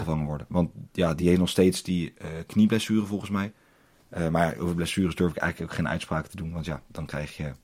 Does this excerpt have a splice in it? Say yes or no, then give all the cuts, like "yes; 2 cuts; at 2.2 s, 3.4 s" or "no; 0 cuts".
no; 0 cuts